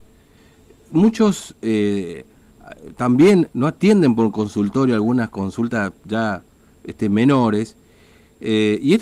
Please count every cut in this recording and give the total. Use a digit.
1